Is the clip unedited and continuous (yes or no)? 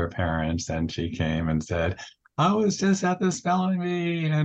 yes